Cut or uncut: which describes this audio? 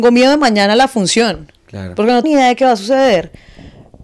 cut